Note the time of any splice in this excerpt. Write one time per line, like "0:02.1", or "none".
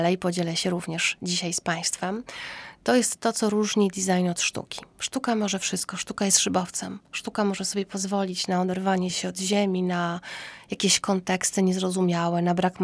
none